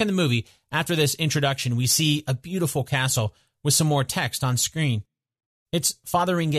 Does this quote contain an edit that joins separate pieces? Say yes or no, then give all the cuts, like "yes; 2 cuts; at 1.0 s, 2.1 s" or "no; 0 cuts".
no; 0 cuts